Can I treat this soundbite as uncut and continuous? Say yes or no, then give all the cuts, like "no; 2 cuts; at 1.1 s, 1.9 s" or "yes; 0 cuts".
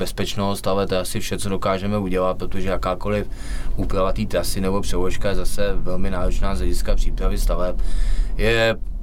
yes; 0 cuts